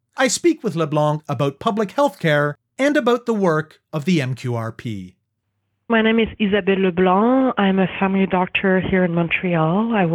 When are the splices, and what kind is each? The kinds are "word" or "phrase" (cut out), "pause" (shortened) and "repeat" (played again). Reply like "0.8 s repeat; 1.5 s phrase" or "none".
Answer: 5.4 s pause

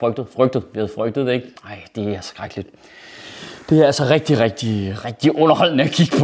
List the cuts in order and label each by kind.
1.6 s pause

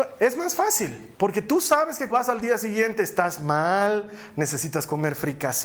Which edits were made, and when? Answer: 1.1 s pause; 2.1 s word

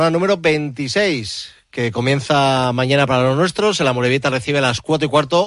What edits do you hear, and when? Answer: none

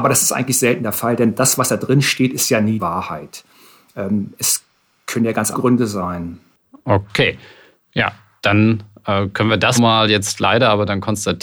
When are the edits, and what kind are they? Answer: 2.8 s word; 5.5 s word; 9.8 s word

